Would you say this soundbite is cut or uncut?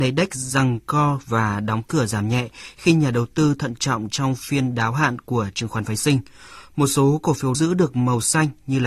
cut